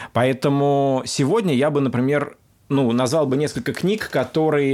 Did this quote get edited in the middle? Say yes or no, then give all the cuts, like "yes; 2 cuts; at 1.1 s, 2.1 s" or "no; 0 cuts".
no; 0 cuts